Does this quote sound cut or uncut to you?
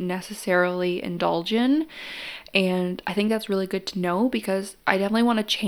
uncut